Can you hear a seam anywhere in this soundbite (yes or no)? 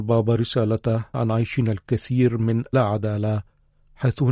yes